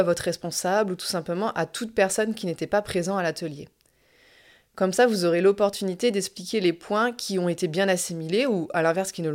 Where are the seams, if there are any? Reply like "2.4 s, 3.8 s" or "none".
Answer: none